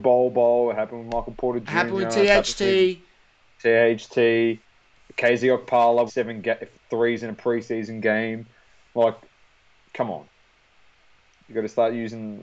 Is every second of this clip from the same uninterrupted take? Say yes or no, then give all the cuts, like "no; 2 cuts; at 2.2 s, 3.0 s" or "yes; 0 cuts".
no; 1 cut; at 6.1 s